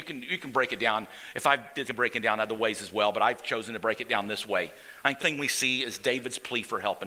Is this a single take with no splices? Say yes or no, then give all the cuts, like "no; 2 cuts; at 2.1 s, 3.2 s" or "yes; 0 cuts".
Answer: no; 2 cuts; at 1.9 s, 5.2 s